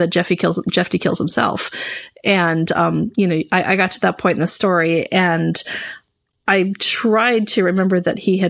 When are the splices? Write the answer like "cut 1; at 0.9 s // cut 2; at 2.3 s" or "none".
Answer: none